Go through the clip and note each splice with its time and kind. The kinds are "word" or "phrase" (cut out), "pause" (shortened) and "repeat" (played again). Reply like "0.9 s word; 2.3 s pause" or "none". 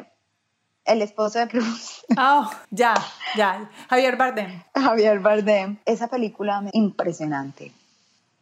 1.5 s word; 2.6 s word; 4.7 s pause; 5.8 s pause; 6.7 s word